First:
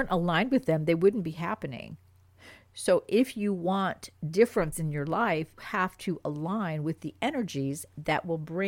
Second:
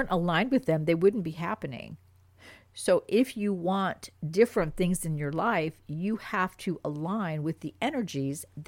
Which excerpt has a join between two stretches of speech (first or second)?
first